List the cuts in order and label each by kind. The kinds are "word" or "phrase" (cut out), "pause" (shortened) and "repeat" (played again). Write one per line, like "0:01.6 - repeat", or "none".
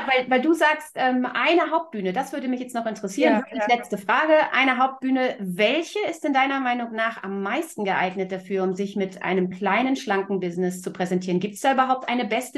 none

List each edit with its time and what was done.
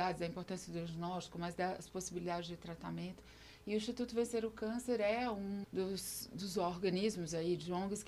0:05.6 - word

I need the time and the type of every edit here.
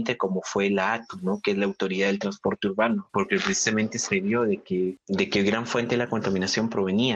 none

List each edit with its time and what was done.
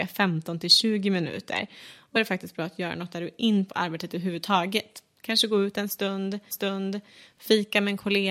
0:02.2 - word
0:03.7 - phrase
0:06.5 - repeat

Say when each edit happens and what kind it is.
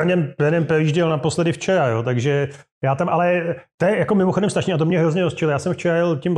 none

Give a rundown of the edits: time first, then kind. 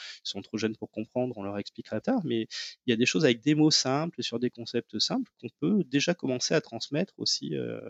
0:02.0 - word

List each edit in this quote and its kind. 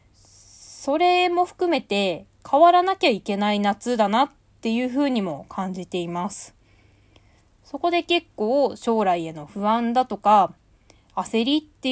none

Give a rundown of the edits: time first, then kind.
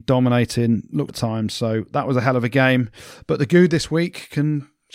0:01.1 - word

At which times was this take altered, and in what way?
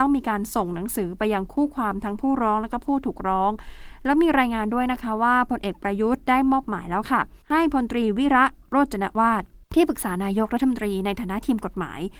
0:07.4 - pause
0:09.6 - pause

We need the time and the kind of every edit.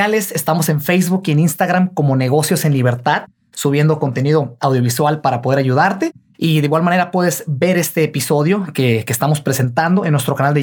none

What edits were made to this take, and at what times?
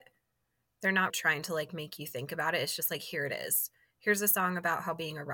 0:01.1 - word

